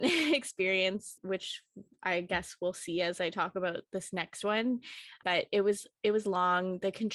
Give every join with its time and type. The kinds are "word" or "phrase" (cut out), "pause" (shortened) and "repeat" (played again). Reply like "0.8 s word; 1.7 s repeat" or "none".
1.2 s word